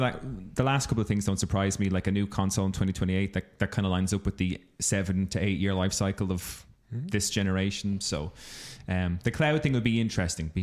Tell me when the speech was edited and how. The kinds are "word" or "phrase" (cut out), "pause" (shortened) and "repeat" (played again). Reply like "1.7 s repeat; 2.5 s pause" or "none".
none

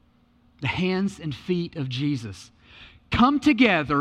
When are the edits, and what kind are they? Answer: none

